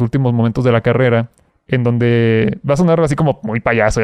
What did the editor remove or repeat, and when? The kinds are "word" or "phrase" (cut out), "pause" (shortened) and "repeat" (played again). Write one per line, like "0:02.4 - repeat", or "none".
0:01.5 - pause

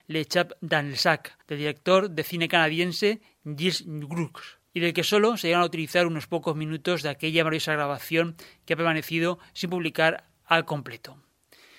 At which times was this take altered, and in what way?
0:01.4 - pause
0:04.7 - pause

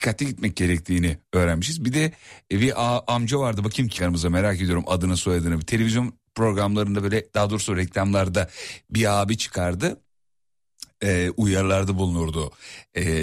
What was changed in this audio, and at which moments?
0:04.0 - word

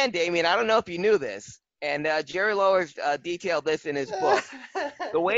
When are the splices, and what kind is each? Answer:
none

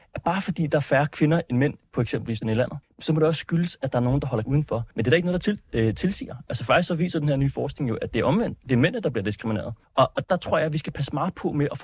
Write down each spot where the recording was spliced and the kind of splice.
0:02.4 - word
0:02.8 - pause
0:04.4 - word
0:04.9 - pause
0:09.8 - pause
0:10.2 - word

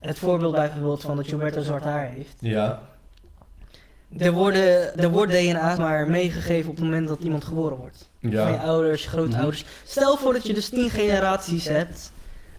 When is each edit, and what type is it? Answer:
0:04.9 - word
0:05.8 - word

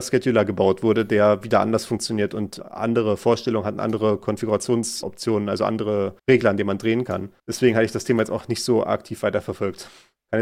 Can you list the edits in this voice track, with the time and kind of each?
0:06.2 - pause
0:07.4 - pause

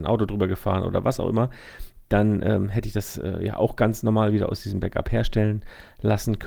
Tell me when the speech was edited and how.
none

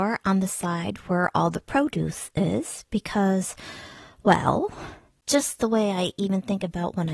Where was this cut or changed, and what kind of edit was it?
none

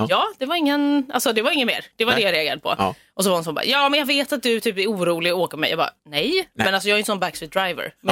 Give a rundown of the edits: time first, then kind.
0:06.0 - pause

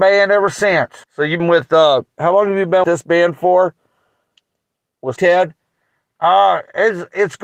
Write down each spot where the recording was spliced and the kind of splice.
0:01.0 - pause
0:01.4 - word
0:02.8 - word
0:05.2 - word

